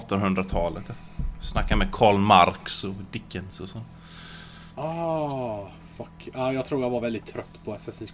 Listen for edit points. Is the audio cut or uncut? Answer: uncut